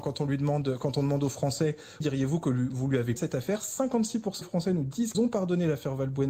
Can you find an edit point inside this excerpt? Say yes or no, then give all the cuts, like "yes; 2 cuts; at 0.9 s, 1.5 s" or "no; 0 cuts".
yes; 4 cuts; at 2.0 s, 3.2 s, 4.4 s, 5.1 s